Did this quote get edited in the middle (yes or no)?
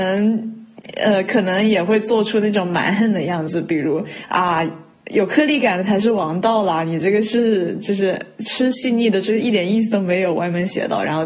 no